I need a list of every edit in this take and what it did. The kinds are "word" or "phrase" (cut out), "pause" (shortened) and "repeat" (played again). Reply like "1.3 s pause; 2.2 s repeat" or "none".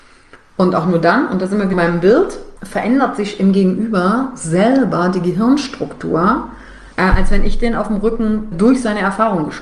1.7 s word; 2.6 s pause; 6.9 s pause; 8.5 s word